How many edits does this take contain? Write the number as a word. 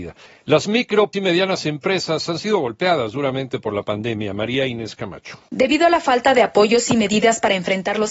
one